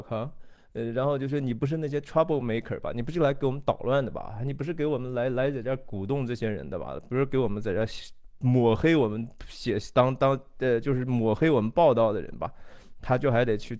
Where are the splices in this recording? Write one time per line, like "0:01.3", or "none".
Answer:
none